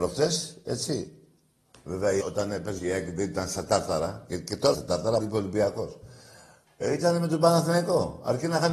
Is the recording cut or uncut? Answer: cut